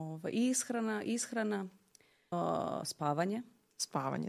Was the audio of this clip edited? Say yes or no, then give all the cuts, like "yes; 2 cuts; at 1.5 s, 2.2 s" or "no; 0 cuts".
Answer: yes; 1 cut; at 2.3 s